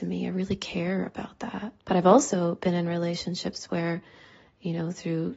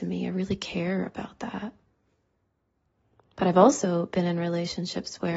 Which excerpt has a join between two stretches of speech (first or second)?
first